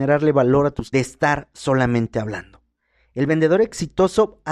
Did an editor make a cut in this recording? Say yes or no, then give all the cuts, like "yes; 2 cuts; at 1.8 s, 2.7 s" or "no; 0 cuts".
yes; 1 cut; at 0.9 s